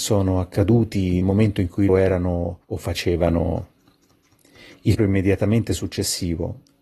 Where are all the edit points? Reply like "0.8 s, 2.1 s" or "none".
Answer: 1.2 s, 1.9 s, 2.6 s, 5.0 s